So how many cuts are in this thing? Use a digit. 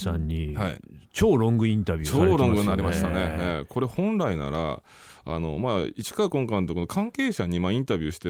1